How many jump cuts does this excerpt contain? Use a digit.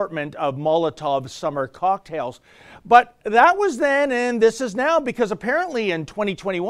0